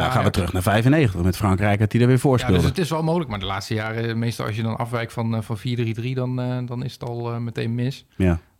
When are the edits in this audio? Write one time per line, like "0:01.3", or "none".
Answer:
none